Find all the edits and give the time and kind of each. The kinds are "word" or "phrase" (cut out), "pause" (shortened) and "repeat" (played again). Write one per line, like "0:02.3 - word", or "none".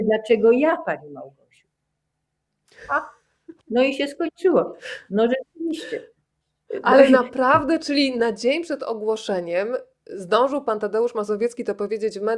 0:03.6 - pause